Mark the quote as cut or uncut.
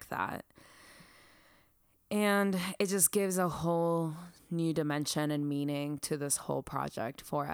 uncut